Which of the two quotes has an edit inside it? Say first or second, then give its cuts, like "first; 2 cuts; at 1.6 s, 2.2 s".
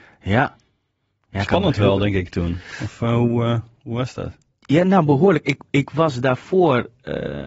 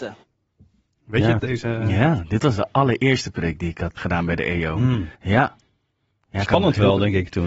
second; 3 cuts; at 1.4 s, 4.0 s, 5.1 s